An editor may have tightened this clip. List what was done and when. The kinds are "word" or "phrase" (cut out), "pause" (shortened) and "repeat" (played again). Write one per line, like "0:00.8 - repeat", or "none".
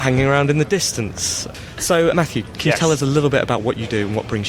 0:02.1 - word